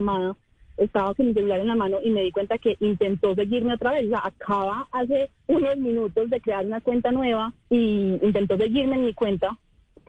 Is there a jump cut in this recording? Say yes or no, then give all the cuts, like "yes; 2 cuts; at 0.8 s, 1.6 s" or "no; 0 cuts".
yes; 2 cuts; at 5.4 s, 7.6 s